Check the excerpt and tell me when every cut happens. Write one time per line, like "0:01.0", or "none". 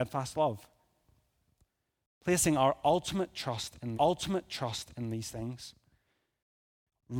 0:03.9